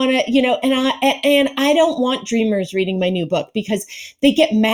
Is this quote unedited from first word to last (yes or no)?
yes